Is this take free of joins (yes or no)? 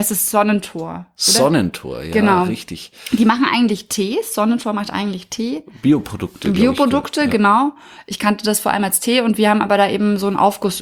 yes